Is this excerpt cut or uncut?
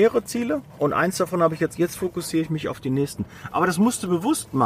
cut